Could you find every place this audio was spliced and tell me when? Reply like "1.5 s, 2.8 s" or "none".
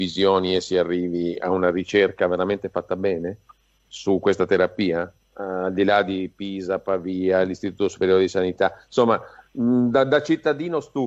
none